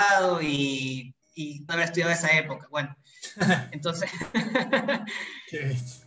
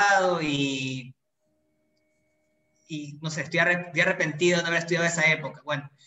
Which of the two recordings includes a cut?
first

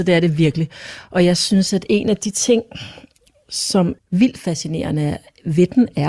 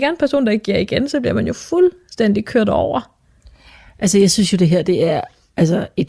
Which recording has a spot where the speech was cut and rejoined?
first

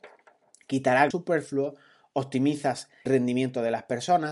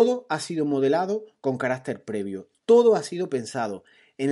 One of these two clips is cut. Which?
first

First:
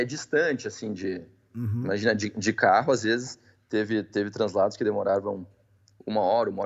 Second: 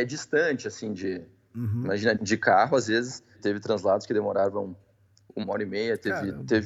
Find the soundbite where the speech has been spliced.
second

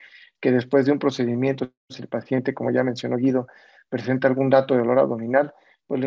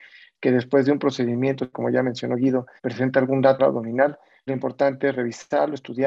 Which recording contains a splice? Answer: second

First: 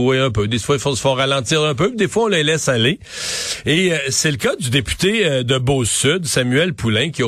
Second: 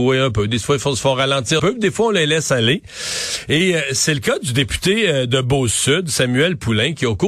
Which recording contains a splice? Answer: second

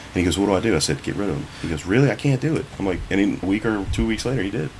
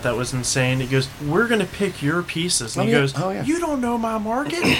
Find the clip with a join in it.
first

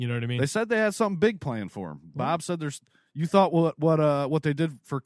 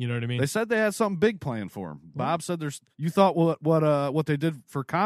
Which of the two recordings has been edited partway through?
second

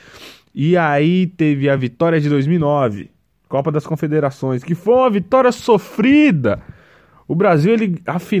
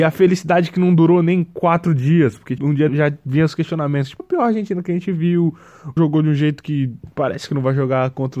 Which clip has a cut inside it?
second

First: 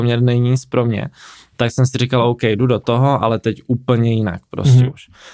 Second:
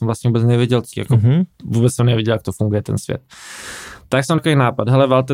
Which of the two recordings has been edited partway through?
second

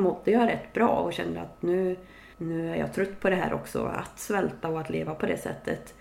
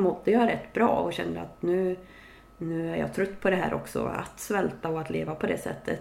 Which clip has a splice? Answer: first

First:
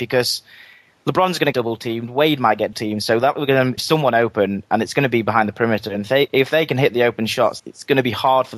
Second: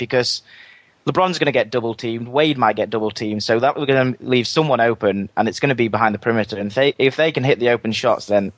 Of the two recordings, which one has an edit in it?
first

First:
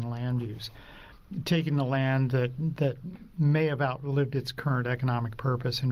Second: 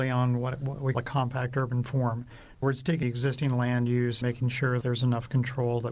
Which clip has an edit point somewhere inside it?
second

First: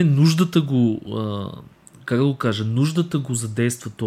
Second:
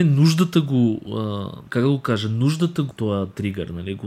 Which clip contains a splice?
second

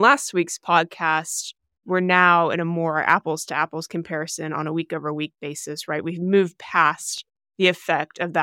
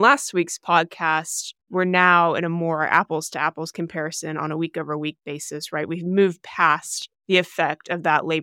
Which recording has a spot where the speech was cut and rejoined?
second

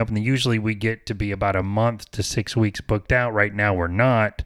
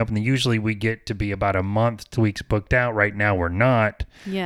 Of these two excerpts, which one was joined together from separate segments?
second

